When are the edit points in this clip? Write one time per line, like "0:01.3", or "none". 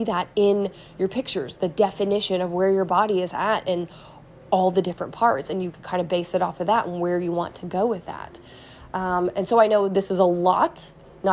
none